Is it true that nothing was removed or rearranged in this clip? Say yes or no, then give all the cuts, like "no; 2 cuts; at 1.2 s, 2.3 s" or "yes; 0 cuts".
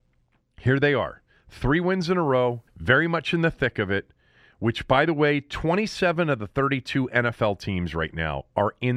no; 1 cut; at 2.7 s